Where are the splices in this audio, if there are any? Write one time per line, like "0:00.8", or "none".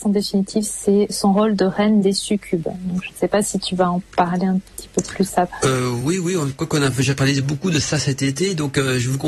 none